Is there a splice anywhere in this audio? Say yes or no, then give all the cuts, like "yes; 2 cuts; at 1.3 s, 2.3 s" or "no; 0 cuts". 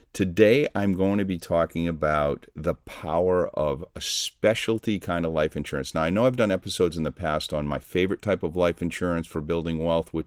no; 0 cuts